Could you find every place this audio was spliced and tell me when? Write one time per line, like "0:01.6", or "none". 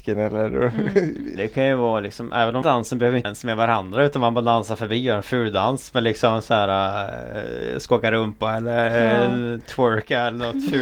0:01.4
0:02.6
0:03.2